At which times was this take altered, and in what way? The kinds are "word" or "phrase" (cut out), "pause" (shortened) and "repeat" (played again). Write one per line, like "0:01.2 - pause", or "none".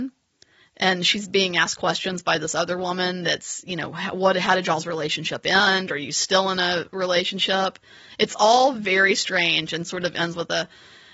none

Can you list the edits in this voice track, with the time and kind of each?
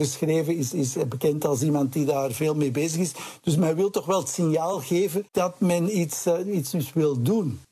none

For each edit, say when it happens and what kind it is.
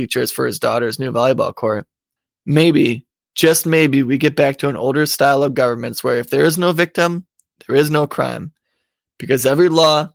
0:02.2 - pause

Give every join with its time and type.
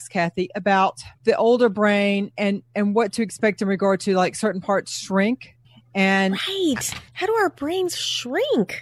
0:01.2 - pause
0:05.6 - pause
0:07.1 - pause

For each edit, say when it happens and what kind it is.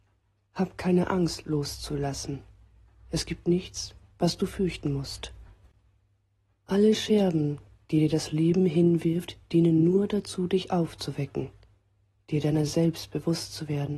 none

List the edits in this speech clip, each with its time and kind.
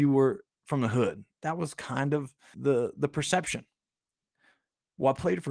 0:02.5 - word

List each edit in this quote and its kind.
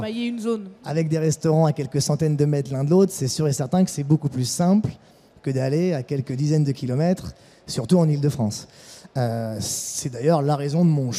none

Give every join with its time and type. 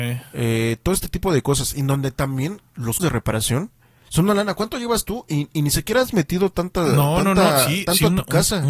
0:03.0 - word

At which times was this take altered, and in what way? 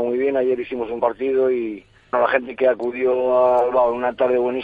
0:01.0 - word
0:02.1 - word
0:02.6 - word

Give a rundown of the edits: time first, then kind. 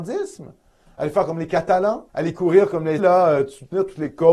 0:02.1 - pause
0:03.0 - word

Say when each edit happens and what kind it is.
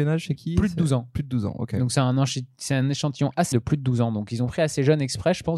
0:03.5 - phrase

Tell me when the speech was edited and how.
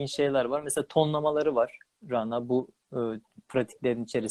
none

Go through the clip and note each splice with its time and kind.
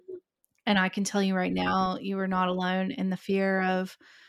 none

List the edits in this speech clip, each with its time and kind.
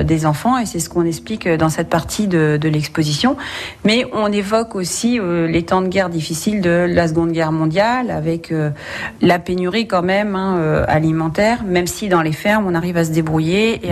none

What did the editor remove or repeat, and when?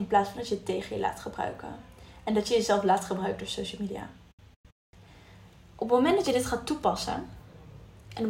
none

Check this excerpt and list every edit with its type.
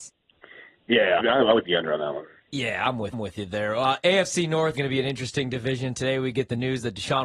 0:01.2 - word
0:01.6 - word
0:03.1 - repeat
0:04.7 - word

